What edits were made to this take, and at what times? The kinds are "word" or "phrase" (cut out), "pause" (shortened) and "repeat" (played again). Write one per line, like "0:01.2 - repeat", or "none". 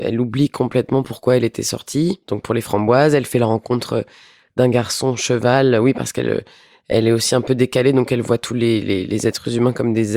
0:02.2 - pause

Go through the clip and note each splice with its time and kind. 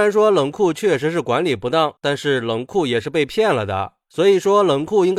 0:02.0 - pause

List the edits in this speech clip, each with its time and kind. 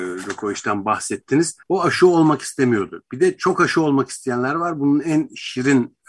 0:01.6 - pause

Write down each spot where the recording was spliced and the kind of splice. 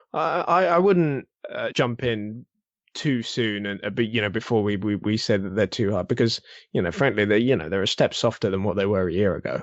0:01.7 - word

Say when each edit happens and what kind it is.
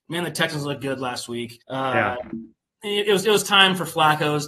0:01.6 - pause

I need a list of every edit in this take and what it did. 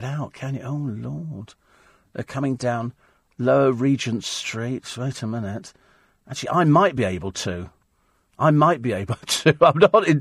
none

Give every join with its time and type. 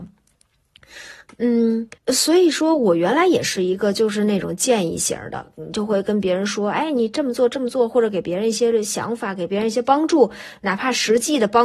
0:02.0 - pause

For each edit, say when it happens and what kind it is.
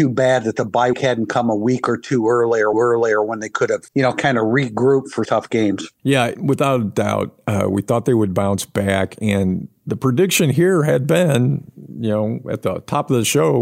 0:00.9 - word
0:02.7 - repeat
0:03.9 - pause
0:05.2 - phrase

